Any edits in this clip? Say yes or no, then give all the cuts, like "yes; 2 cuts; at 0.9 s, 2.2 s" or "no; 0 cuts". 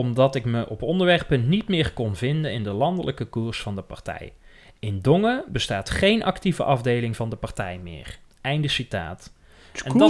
no; 0 cuts